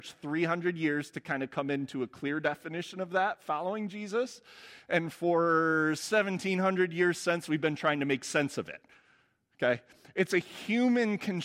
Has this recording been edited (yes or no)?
no